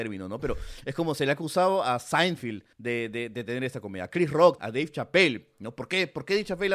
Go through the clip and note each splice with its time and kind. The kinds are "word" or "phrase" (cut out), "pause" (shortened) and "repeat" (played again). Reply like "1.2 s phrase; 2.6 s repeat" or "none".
2.7 s pause; 4.6 s word